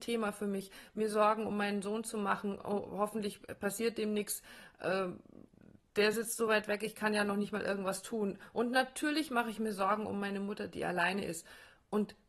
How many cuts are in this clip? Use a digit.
0